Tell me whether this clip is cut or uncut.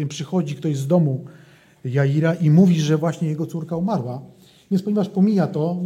uncut